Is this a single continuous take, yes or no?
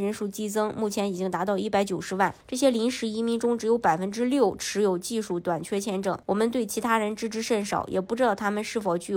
no